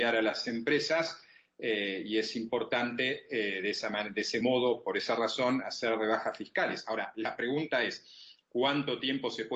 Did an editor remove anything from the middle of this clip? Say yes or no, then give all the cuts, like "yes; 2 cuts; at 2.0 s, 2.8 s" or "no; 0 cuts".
no; 0 cuts